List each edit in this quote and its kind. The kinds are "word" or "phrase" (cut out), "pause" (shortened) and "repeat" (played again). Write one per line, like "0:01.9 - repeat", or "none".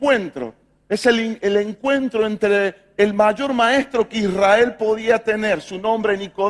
none